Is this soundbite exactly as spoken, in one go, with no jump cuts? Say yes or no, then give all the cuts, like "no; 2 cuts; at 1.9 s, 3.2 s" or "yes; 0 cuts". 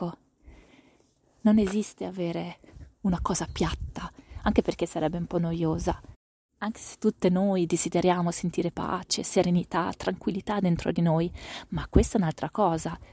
yes; 0 cuts